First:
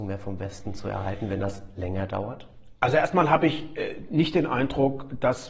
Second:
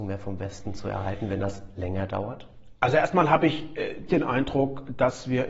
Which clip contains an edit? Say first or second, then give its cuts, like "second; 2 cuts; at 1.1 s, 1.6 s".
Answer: second; 1 cut; at 4.1 s